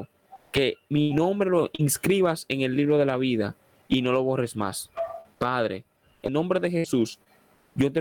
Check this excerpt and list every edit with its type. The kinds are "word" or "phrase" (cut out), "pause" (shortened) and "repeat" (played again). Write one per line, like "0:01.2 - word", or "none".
0:06.3 - word